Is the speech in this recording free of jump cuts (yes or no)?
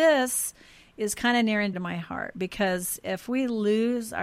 no